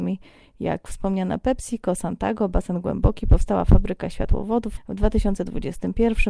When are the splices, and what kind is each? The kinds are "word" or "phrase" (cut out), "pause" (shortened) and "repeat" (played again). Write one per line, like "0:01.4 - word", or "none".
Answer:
0:04.8 - word

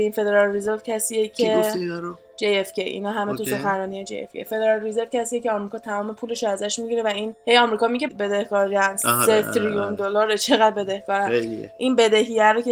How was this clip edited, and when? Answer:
none

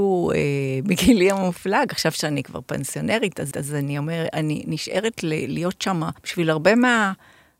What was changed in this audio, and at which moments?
0:03.5 - repeat
0:06.2 - pause

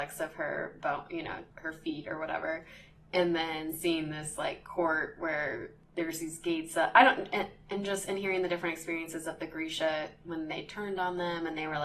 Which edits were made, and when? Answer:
0:01.5 - word

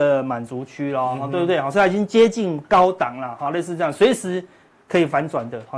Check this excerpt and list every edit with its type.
none

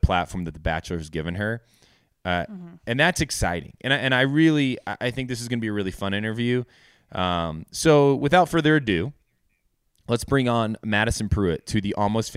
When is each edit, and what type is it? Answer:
none

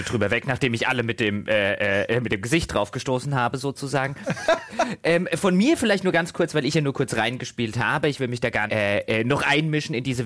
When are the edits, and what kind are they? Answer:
0:08.7 - word

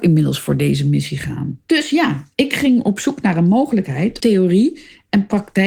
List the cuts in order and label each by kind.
0:01.6 - pause
0:04.2 - word

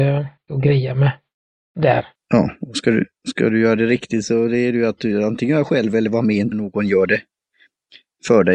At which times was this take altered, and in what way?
0:06.5 - phrase

